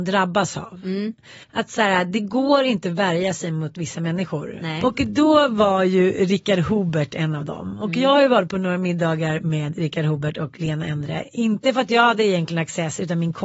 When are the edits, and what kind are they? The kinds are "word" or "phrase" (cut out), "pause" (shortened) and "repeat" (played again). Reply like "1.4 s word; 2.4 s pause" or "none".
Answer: 1.4 s pause